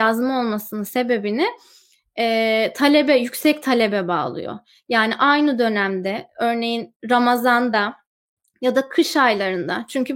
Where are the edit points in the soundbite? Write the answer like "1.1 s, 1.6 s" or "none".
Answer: none